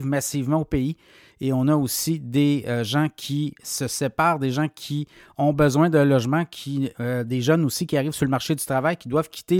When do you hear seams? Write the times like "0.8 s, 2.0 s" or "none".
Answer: none